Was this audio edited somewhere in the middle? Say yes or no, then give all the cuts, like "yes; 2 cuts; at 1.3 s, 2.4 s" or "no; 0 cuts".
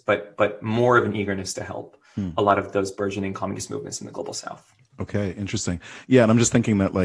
no; 0 cuts